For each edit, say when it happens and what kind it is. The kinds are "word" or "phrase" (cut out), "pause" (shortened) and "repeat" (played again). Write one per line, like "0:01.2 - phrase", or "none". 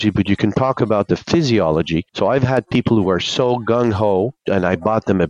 0:02.1 - pause
0:04.4 - pause